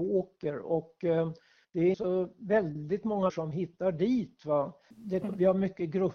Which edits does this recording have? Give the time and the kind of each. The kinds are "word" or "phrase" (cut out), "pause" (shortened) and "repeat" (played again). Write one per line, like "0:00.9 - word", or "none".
0:01.9 - word
0:03.3 - word
0:05.2 - word